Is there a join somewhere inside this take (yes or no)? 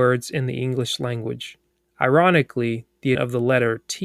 yes